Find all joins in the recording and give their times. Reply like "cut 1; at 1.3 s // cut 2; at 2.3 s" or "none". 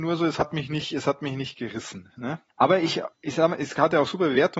cut 1; at 2.5 s // cut 2; at 3.1 s